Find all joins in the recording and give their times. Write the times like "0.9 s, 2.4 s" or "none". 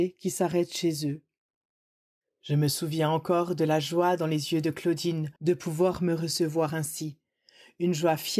5.4 s